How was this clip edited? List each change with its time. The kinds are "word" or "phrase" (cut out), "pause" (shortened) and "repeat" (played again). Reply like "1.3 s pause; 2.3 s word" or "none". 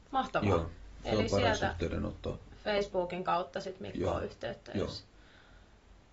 none

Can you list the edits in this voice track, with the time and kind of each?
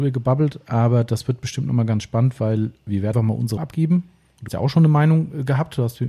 3.1 s word; 3.6 s word; 4.5 s word

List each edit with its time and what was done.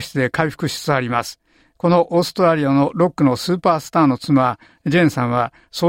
none

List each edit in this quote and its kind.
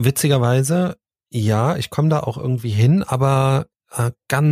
none

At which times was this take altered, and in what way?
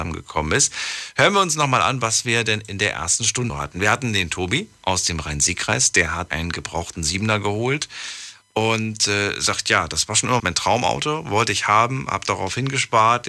3.5 s word; 6.3 s word; 10.4 s word

